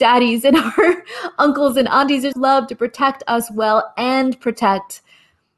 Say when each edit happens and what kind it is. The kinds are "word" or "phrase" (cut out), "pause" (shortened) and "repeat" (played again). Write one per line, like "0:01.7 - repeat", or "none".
0:02.3 - word